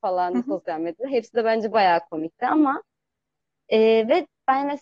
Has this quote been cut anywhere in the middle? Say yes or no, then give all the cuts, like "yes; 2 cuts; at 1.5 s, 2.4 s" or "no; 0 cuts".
no; 0 cuts